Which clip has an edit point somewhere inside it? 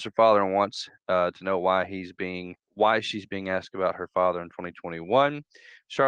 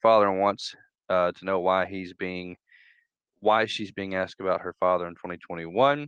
first; 2 cuts; at 1.0 s, 2.6 s

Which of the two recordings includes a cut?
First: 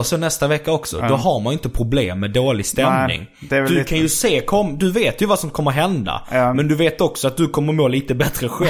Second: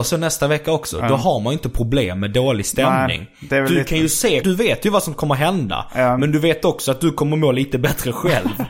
second; 1 cut; at 4.4 s

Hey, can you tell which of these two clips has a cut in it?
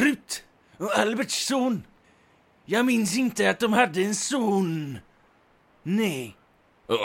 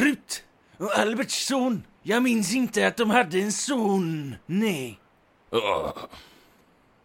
second; 2 cuts; at 2.0 s, 4.4 s

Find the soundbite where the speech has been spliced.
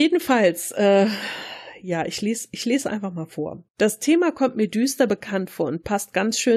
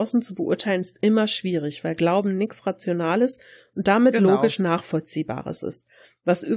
first; 1 cut; at 3.7 s

